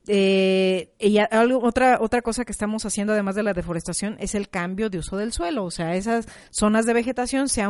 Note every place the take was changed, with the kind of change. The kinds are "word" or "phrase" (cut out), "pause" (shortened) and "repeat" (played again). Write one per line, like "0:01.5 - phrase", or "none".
none